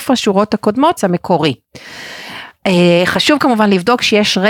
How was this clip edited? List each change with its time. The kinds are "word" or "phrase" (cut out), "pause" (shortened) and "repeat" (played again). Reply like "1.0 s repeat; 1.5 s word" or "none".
1.0 s word